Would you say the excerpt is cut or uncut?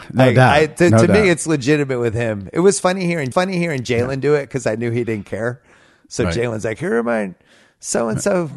cut